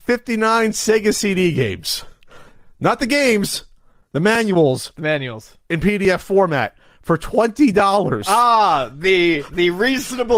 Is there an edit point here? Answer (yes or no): no